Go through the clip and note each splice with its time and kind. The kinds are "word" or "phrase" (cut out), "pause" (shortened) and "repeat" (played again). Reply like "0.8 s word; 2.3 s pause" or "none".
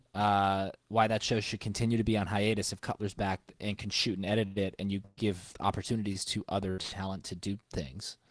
none

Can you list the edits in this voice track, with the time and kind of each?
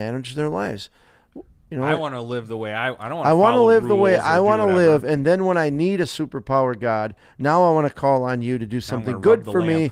none

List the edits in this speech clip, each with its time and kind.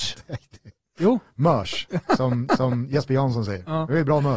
2.5 s repeat

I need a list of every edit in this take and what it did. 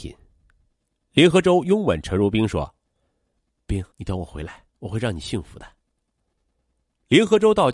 3.9 s pause; 4.7 s pause

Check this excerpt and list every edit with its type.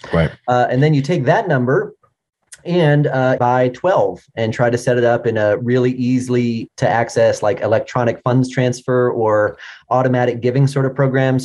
3.4 s phrase; 6.7 s word

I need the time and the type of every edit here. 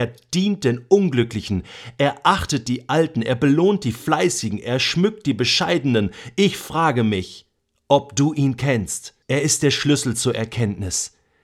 9.2 s pause

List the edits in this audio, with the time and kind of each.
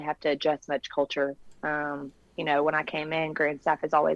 1.6 s pause

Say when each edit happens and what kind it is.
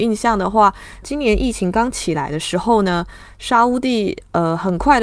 1.0 s word

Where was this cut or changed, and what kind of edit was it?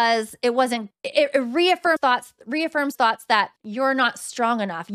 0.9 s phrase; 2.0 s word; 3.0 s word; 3.6 s pause

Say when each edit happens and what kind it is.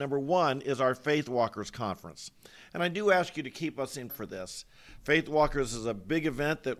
4.1 s word

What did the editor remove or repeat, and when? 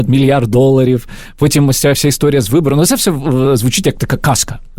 none

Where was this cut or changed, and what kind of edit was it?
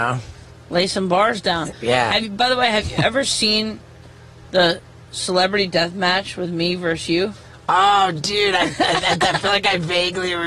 none

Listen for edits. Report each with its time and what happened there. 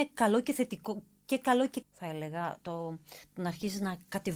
1.8 s word

